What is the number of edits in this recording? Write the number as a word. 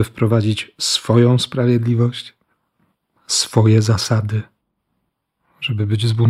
zero